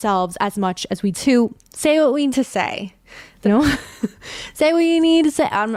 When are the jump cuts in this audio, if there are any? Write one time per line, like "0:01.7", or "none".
0:01.1
0:02.3
0:03.4